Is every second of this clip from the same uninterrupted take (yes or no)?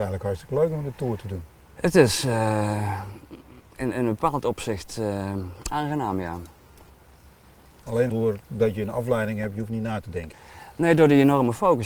no